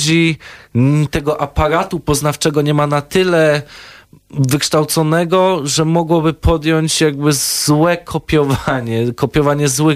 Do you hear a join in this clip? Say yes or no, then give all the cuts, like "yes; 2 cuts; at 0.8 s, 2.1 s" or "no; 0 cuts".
no; 0 cuts